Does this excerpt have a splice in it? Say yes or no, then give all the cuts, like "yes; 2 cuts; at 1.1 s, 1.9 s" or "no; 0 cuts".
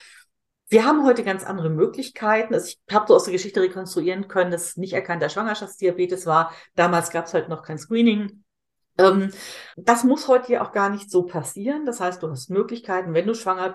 yes; 2 cuts; at 2.8 s, 9.7 s